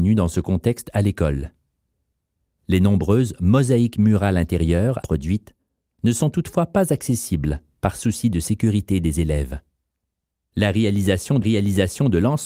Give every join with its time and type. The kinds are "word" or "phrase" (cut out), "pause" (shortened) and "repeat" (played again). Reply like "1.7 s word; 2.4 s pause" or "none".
5.0 s word; 11.4 s repeat